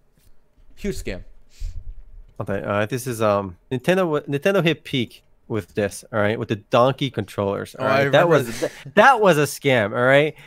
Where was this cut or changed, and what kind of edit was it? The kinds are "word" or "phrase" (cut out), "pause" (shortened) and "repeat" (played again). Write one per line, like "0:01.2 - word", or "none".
0:02.3 - pause
0:02.9 - word
0:03.6 - pause
0:05.3 - pause
0:07.1 - word